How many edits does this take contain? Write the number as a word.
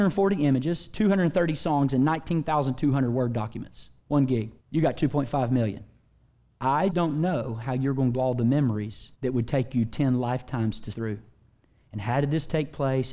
six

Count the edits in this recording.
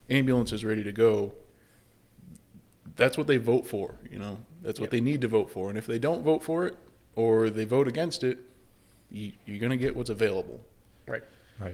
zero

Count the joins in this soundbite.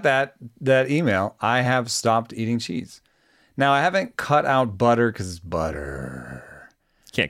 zero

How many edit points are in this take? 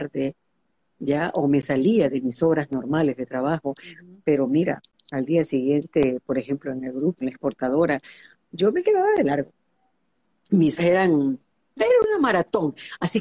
three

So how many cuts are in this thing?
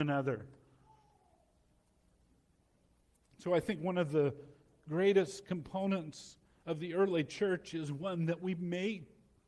zero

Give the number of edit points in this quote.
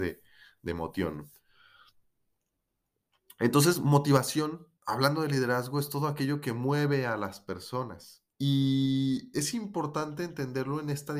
two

